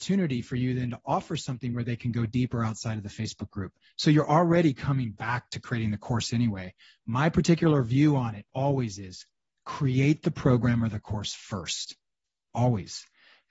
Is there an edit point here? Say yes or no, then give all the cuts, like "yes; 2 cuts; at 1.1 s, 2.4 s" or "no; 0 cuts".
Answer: no; 0 cuts